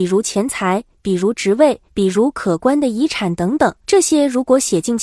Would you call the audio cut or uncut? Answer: cut